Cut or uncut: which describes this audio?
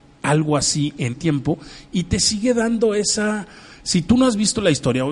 cut